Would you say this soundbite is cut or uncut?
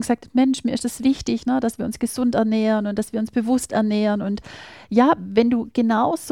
uncut